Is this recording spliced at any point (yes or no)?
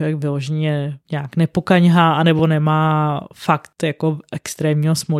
no